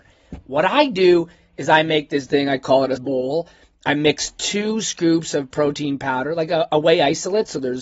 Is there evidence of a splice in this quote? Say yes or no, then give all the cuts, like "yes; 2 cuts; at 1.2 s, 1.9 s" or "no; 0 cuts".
yes; 2 cuts; at 2.3 s, 3.0 s